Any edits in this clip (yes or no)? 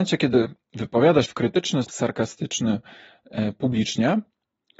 yes